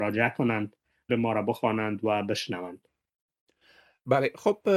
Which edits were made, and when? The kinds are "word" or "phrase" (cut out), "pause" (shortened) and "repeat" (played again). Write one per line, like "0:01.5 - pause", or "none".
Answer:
0:01.1 - phrase